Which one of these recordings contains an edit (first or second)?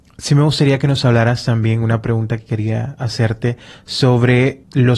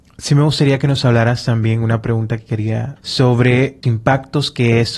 second